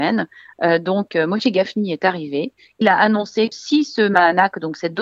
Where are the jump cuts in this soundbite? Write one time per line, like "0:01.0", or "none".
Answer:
0:02.8
0:03.5